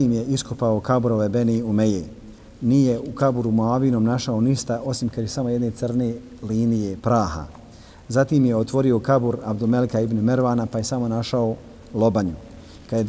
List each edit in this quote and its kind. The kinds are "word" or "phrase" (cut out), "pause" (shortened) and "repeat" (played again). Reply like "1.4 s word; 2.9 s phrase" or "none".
7.0 s word